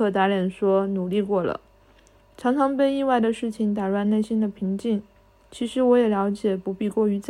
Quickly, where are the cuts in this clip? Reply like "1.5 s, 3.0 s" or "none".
none

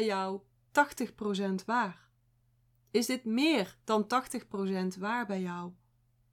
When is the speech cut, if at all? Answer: none

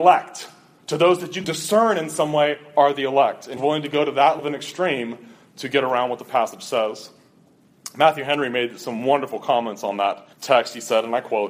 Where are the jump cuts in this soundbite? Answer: 1.4 s, 3.6 s, 4.4 s, 10.3 s

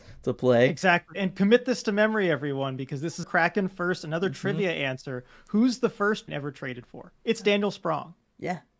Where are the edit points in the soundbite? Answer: 3.2 s, 6.3 s, 7.2 s

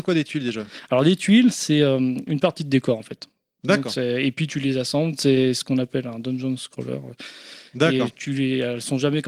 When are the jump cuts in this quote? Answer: none

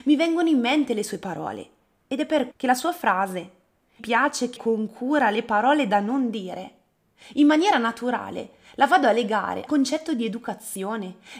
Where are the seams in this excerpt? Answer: 2.5 s, 4.0 s, 4.6 s, 9.7 s

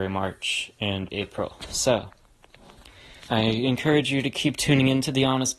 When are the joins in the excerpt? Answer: 1.1 s, 3.2 s

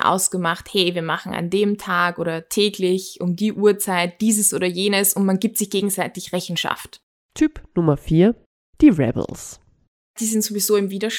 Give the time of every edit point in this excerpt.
none

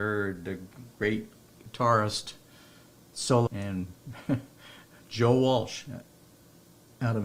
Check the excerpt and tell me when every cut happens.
0.9 s, 3.5 s

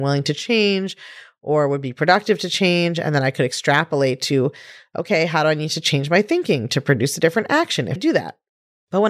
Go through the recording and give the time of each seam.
8.0 s

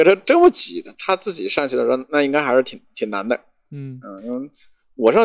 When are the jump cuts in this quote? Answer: none

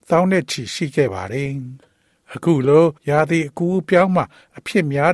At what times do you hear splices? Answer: 3.0 s

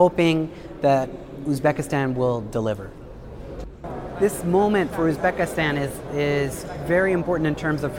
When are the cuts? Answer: none

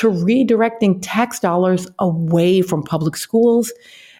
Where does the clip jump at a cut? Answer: none

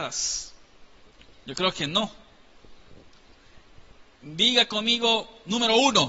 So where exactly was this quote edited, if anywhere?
none

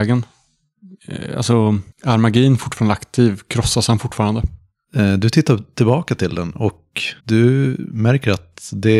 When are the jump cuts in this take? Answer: 1.9 s, 7.2 s

